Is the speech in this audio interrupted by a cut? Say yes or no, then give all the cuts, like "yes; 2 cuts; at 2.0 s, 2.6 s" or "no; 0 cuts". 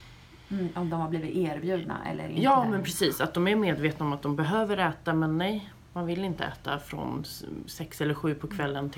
no; 0 cuts